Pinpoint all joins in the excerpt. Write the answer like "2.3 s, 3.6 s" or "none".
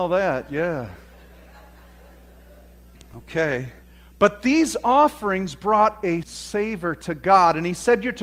3.8 s, 6.2 s